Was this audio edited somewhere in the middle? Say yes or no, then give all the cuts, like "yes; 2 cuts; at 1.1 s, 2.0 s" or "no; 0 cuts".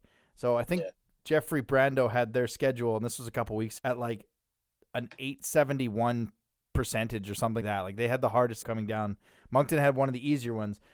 yes; 3 cuts; at 3.8 s, 7.6 s, 8.6 s